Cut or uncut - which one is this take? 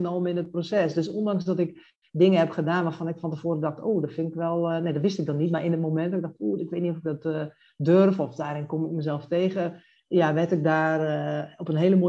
uncut